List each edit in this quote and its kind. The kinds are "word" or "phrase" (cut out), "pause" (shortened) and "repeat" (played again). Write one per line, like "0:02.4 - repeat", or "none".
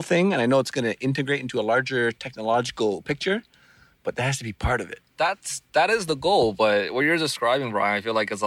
0:05.1 - pause